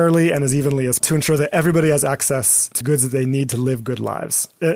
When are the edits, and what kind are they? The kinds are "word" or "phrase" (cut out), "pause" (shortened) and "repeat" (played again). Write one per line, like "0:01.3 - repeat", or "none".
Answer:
0:01.0 - word
0:02.8 - word